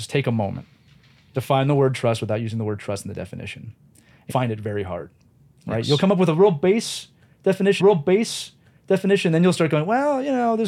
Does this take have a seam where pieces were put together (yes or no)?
yes